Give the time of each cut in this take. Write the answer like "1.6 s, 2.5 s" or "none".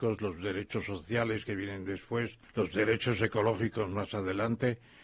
2.4 s